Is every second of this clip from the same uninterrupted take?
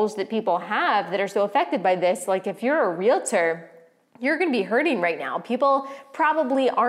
yes; 0 cuts

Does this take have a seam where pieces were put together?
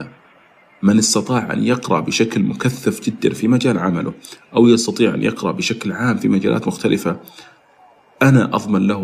no; 0 cuts

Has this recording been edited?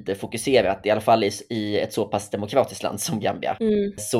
no; 0 cuts

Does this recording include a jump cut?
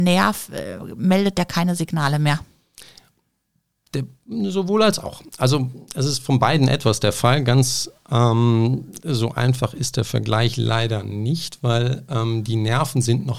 no; 0 cuts

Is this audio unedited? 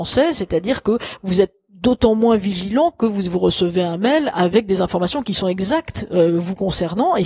yes; 0 cuts

